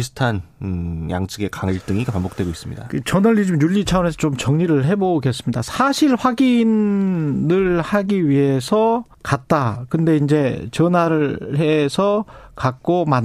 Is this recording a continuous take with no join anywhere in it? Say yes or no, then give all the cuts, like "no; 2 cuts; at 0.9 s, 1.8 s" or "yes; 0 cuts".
no; 1 cut; at 9.1 s